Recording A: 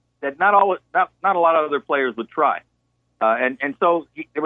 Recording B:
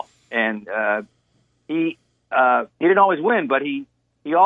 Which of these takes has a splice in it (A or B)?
B